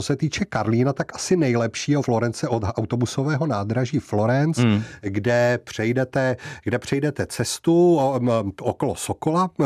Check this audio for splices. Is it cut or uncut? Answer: cut